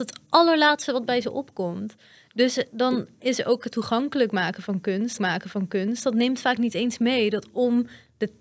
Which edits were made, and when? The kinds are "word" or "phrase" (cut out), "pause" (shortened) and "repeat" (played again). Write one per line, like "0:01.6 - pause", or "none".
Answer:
0:03.7 - word
0:05.2 - repeat